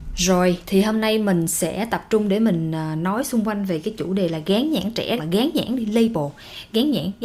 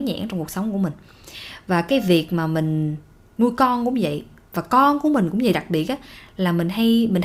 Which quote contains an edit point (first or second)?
first